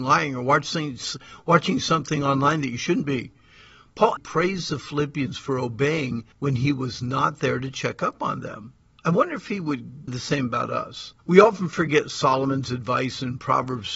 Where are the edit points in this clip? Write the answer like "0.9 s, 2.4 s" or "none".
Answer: 4.2 s, 6.3 s, 8.9 s, 10.1 s, 11.2 s